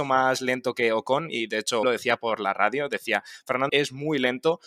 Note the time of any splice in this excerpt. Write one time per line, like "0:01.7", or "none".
0:01.8
0:03.7